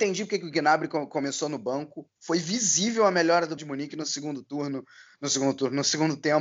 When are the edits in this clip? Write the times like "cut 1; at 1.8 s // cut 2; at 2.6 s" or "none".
cut 1; at 3.6 s